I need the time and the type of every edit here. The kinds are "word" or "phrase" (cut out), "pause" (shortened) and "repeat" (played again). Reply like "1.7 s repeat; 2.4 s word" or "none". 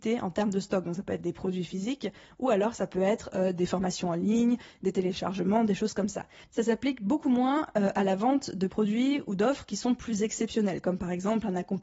none